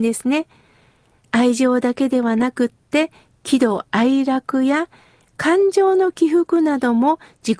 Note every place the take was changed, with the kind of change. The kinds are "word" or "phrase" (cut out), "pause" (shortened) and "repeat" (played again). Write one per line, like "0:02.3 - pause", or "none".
none